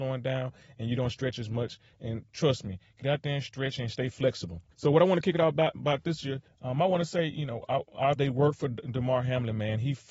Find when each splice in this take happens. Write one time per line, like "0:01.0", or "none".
0:04.7
0:06.5
0:08.2